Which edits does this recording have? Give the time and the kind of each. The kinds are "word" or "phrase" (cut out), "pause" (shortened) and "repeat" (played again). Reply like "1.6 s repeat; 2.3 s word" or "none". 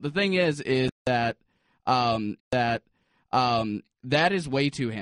2.4 s repeat